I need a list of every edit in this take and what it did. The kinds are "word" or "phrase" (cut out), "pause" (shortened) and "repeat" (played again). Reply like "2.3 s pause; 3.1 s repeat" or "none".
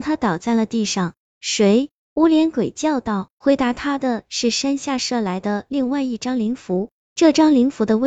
3.4 s pause